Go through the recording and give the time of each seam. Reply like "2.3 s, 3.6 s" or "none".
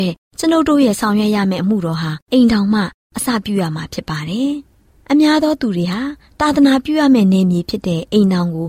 2.2 s